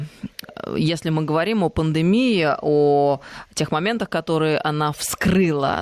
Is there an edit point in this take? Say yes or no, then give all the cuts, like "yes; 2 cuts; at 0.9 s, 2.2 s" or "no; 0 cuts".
no; 0 cuts